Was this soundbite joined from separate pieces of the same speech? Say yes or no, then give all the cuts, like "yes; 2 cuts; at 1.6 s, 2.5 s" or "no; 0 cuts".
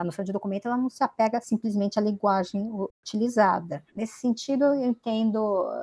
yes; 1 cut; at 3.9 s